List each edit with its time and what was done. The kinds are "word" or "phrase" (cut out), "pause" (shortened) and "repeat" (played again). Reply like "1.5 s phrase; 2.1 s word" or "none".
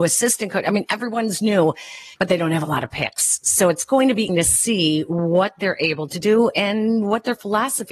2.1 s pause; 4.3 s word